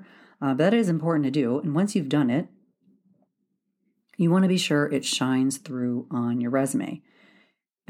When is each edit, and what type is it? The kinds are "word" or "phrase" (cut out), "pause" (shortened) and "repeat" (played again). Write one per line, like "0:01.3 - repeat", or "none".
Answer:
none